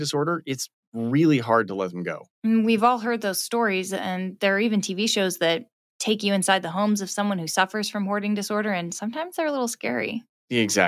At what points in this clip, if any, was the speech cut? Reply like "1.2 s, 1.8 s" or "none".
2.3 s